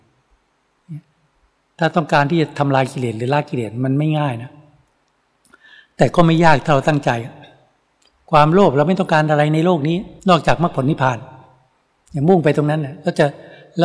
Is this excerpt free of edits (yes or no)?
no